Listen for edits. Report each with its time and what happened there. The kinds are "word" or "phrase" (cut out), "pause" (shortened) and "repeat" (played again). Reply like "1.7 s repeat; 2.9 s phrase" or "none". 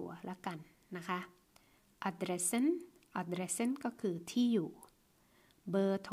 none